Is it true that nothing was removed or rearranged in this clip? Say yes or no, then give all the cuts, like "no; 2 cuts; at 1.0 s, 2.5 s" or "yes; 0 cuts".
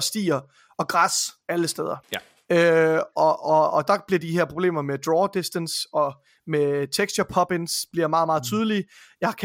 no; 1 cut; at 2.0 s